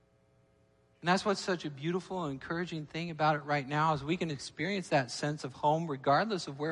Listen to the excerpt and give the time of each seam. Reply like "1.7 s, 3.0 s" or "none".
none